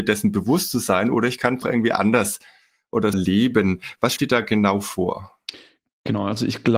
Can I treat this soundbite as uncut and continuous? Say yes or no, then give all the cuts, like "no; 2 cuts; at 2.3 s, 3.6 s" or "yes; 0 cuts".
no; 3 cuts; at 1.6 s, 3.1 s, 4.2 s